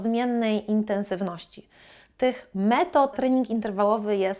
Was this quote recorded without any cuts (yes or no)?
no